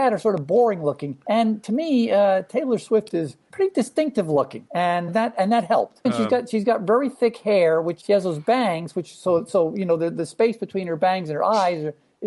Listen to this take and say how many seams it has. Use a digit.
1